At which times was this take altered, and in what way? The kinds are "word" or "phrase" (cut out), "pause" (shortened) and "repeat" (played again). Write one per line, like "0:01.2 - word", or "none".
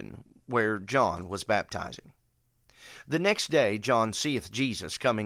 none

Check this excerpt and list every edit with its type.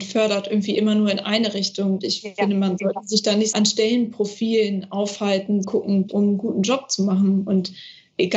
0:02.0 - word
0:03.5 - word
0:05.6 - word
0:06.1 - phrase

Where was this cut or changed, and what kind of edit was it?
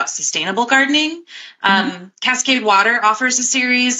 none

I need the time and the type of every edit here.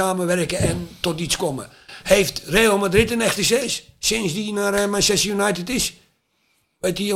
none

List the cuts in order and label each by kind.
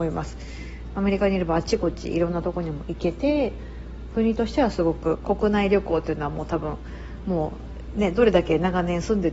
0:04.1 - phrase

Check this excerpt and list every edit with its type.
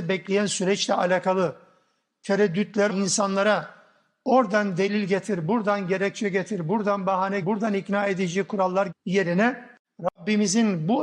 0:02.9 - word
0:07.4 - word
0:08.9 - word

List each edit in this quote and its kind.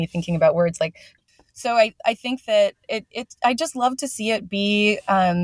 0:01.2 - phrase

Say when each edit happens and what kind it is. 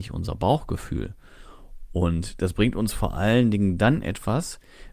none

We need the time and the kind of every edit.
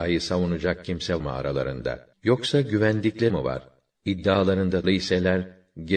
0:01.2 - word
0:02.1 - pause
0:03.3 - word
0:04.8 - word

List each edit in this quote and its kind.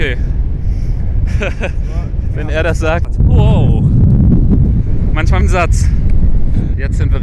0:05.4 - phrase

